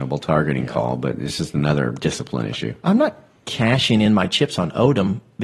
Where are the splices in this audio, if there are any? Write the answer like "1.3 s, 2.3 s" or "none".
none